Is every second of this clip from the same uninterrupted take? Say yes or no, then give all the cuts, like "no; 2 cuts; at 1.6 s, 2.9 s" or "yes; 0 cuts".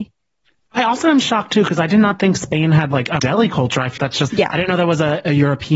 no; 3 cuts; at 3.2 s, 4.0 s, 4.3 s